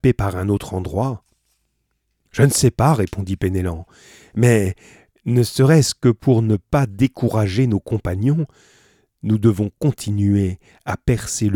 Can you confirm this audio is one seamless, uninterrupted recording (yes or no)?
yes